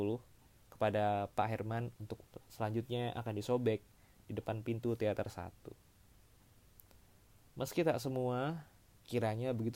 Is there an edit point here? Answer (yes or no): no